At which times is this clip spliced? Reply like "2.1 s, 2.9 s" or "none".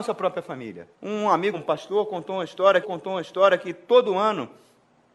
0.9 s, 1.5 s, 2.8 s